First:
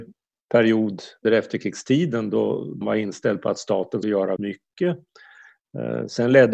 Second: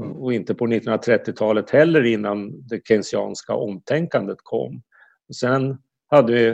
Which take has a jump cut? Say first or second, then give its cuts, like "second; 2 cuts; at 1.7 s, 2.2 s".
first; 4 cuts; at 1.2 s, 2.8 s, 4.0 s, 4.4 s